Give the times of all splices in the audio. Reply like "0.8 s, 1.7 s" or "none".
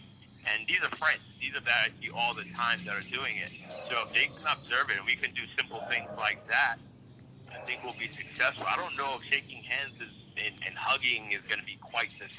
1.3 s, 1.6 s